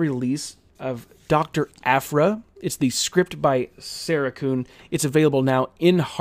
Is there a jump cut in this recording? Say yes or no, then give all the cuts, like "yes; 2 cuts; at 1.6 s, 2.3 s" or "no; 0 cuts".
no; 0 cuts